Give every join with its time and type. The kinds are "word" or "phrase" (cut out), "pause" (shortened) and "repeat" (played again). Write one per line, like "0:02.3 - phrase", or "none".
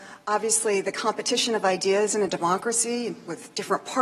none